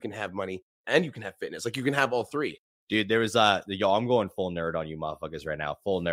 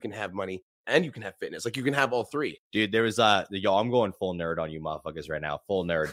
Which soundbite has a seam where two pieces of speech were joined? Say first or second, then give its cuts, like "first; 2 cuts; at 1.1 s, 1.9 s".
second; 1 cut; at 2.6 s